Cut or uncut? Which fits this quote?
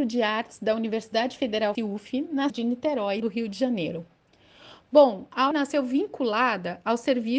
cut